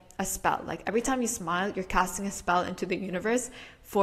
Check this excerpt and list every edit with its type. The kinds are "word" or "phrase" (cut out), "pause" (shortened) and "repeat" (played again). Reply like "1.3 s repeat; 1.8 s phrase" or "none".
none